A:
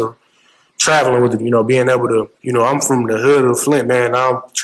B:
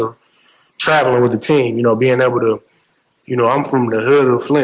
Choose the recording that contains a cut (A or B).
A